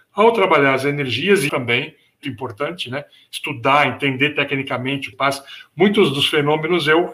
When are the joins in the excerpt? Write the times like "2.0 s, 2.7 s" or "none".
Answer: 1.5 s, 2.2 s, 5.1 s